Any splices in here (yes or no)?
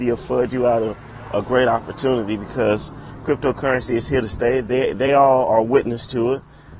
no